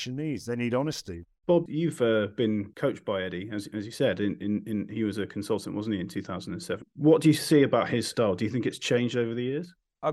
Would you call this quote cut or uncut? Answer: uncut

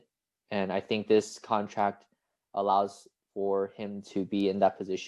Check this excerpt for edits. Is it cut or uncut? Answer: uncut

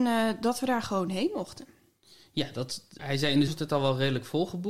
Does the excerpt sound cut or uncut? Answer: cut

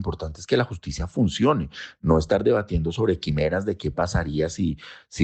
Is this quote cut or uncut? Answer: uncut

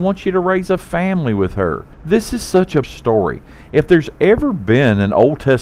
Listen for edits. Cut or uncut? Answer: cut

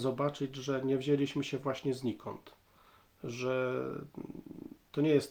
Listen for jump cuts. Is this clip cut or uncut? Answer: uncut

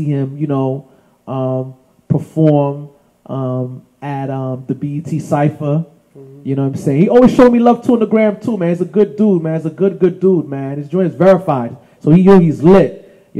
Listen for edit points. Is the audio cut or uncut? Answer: uncut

